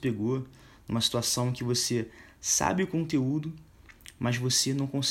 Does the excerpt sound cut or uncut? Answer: uncut